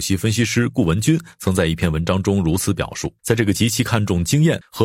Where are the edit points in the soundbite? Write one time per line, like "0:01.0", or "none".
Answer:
0:03.2